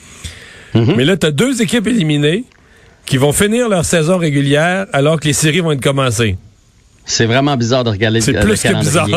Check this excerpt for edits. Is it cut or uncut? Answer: uncut